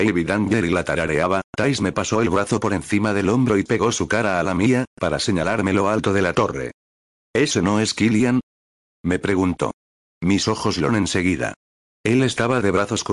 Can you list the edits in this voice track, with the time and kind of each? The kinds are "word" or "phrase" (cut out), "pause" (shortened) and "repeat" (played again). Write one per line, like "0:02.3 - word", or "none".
0:10.9 - word

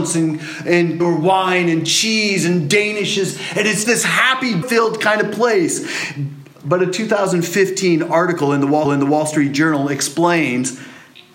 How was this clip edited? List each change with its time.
0:01.0 - word
0:03.8 - word
0:04.6 - word
0:08.8 - repeat

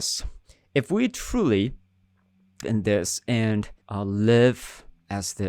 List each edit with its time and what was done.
0:02.6 - word
0:03.8 - pause

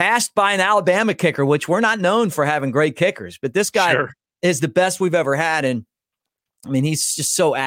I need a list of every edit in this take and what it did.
none

